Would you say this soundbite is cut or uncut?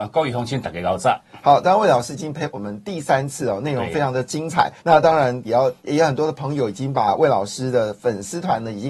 cut